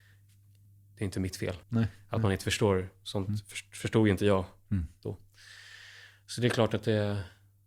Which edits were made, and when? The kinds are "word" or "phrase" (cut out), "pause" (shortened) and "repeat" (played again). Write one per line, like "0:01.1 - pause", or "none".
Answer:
0:01.6 - pause